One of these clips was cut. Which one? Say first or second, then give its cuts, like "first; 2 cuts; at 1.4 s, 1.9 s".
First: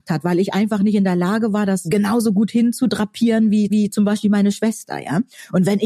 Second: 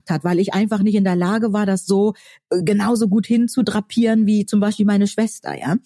first; 2 cuts; at 1.8 s, 3.7 s